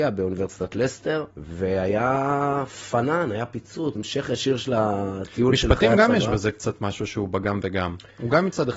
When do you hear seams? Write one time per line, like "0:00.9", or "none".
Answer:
0:01.3
0:04.0